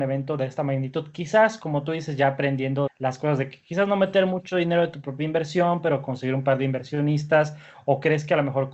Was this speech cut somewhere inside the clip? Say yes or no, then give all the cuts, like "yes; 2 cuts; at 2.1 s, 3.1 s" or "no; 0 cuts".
yes; 1 cut; at 2.9 s